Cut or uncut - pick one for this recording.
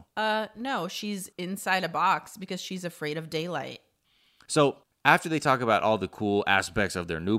cut